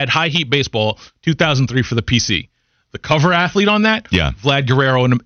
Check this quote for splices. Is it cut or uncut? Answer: uncut